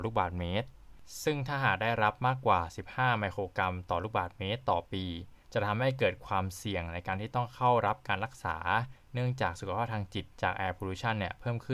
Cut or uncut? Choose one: cut